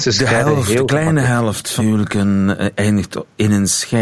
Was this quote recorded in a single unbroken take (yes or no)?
no